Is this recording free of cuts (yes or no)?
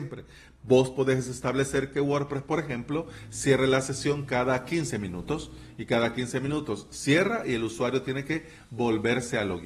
yes